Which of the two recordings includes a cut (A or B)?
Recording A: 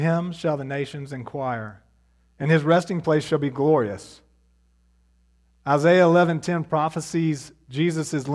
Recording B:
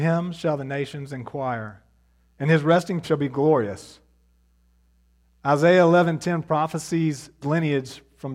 B